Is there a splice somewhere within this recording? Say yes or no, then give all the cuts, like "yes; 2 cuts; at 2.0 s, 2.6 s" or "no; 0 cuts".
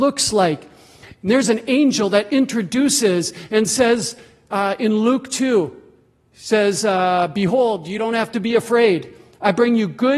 no; 0 cuts